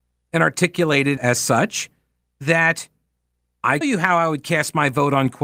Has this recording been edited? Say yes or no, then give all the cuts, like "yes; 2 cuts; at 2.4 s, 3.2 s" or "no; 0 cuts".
yes; 2 cuts; at 1.2 s, 3.8 s